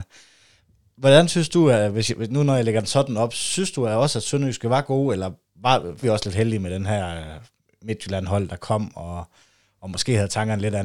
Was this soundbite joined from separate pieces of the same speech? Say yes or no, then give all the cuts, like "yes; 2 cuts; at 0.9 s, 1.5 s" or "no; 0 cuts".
yes; 1 cut; at 6.0 s